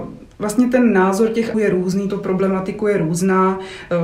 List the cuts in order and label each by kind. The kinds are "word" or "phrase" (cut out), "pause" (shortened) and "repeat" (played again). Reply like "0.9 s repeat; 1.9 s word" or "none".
1.5 s word; 2.1 s phrase